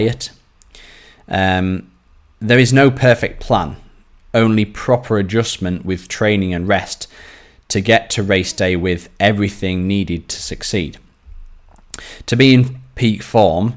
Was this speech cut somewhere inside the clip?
no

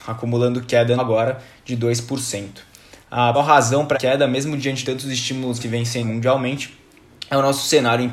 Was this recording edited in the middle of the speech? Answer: yes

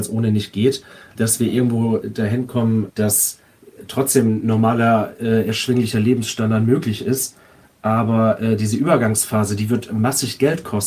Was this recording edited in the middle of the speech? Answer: yes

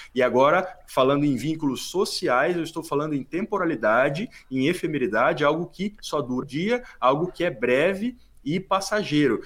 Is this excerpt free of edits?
no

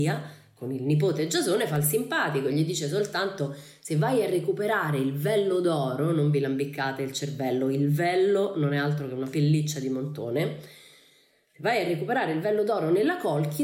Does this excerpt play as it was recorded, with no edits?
yes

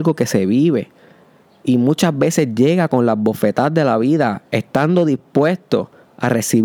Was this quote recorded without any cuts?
yes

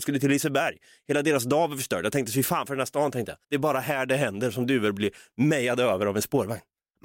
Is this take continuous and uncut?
no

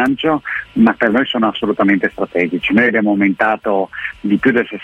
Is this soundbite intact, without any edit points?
no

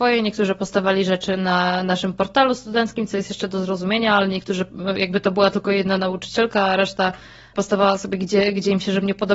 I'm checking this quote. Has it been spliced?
no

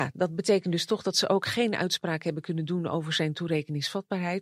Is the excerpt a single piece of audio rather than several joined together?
yes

